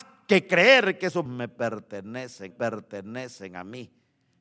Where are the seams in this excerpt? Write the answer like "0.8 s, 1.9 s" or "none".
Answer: 1.3 s, 2.5 s